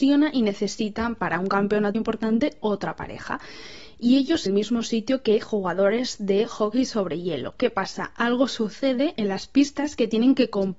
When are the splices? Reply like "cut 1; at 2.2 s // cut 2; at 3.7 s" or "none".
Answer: cut 1; at 1.9 s // cut 2; at 4.5 s // cut 3; at 9.2 s